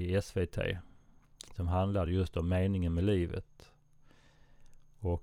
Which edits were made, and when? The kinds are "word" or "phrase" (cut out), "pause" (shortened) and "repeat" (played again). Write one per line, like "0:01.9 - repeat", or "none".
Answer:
none